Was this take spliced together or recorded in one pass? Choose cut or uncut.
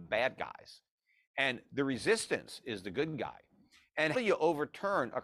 cut